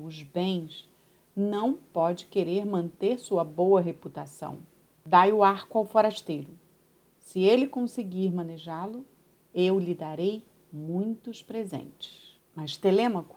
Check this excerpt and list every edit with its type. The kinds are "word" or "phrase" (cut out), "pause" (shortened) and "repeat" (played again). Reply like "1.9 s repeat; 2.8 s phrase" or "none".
none